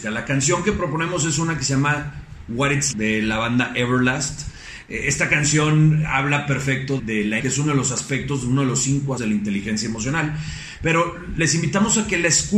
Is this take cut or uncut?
cut